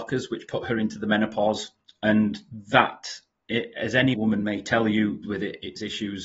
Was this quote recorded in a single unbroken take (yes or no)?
no